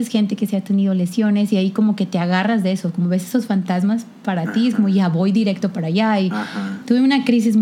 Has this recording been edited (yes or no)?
no